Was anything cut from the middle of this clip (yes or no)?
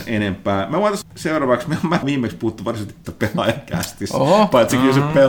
yes